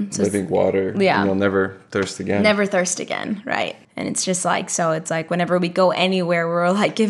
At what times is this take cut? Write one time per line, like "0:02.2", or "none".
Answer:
0:03.8